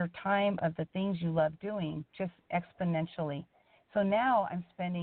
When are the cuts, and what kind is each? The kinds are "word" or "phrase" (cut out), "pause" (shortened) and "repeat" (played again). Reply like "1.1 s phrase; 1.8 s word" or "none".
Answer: 2.1 s pause